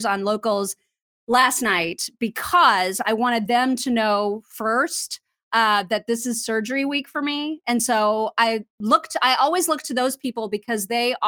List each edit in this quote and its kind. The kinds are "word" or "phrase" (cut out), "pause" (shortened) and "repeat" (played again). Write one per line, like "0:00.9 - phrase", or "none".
none